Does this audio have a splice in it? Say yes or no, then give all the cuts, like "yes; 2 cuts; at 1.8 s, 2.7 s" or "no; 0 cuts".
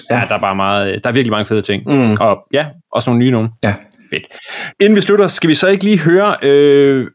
no; 0 cuts